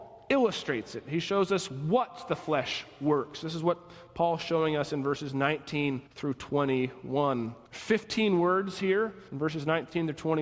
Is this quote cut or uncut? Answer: cut